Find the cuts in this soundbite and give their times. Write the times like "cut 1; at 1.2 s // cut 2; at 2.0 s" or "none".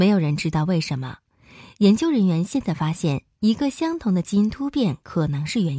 none